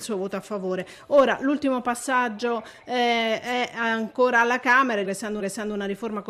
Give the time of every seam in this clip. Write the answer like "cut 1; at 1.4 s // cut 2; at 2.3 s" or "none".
cut 1; at 5.0 s // cut 2; at 5.4 s

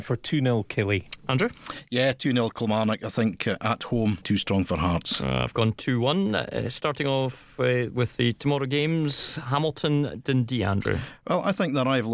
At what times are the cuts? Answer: cut 1; at 4.2 s

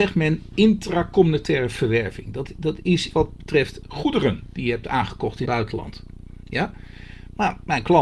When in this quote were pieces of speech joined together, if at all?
cut 1; at 3.1 s // cut 2; at 5.5 s

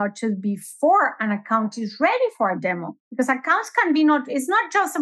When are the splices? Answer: cut 1; at 3.0 s

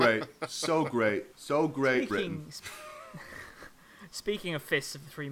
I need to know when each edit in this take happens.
cut 1; at 1.3 s // cut 2; at 2.1 s

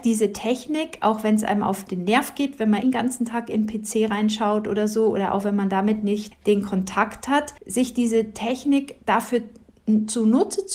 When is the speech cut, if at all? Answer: cut 1; at 2.8 s // cut 2; at 6.3 s // cut 3; at 7.6 s

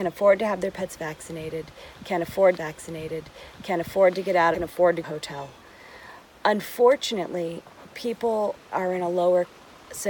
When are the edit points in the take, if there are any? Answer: cut 1; at 2.6 s // cut 2; at 4.5 s // cut 3; at 5.0 s // cut 4; at 8.7 s

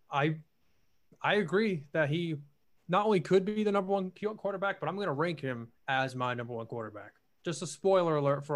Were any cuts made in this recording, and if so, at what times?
cut 1; at 2.6 s // cut 2; at 5.8 s // cut 3; at 7.3 s

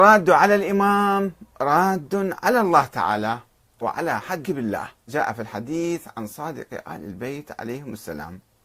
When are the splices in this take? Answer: cut 1; at 3.8 s // cut 2; at 4.4 s // cut 3; at 5.1 s

